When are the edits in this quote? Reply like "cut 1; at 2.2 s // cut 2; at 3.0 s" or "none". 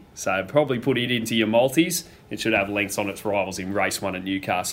none